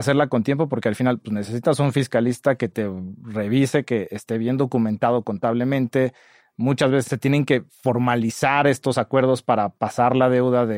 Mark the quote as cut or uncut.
uncut